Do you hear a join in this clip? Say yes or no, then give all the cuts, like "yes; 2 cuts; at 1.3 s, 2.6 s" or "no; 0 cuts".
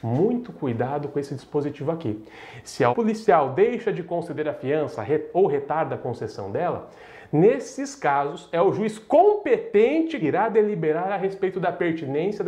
yes; 2 cuts; at 2.9 s, 10.2 s